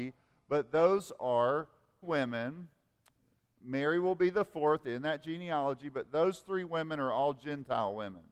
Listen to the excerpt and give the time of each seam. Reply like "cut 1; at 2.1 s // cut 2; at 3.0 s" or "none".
cut 1; at 2.0 s